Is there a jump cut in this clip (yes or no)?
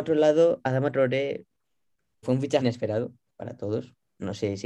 yes